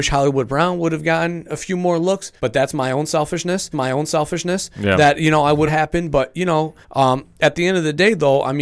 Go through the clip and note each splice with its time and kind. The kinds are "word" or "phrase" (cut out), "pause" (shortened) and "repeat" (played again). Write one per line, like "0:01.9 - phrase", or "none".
0:02.4 - pause
0:03.7 - repeat
0:05.7 - phrase
0:06.8 - pause